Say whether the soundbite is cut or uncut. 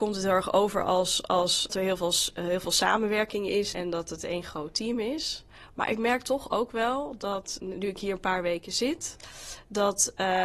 cut